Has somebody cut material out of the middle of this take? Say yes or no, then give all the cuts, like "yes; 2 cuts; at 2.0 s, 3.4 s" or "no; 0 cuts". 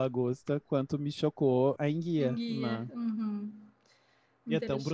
yes; 1 cut; at 1.8 s